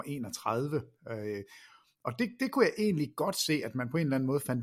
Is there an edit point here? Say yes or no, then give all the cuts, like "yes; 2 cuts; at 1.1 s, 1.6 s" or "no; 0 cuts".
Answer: no; 0 cuts